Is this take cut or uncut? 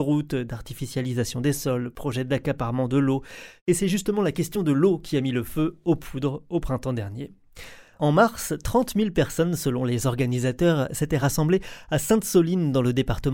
uncut